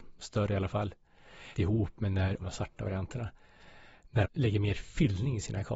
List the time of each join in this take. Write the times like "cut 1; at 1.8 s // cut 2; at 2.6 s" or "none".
cut 1; at 1.5 s // cut 2; at 2.4 s // cut 3; at 4.2 s